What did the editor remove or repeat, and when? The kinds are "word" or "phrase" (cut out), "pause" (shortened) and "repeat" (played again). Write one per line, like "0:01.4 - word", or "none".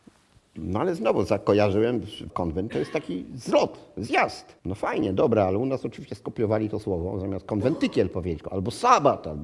0:02.3 - phrase
0:04.6 - pause